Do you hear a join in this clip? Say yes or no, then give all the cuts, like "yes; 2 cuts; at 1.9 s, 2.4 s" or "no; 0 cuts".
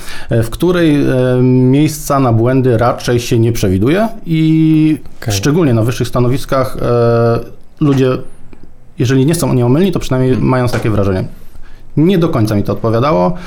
yes; 1 cut; at 10.7 s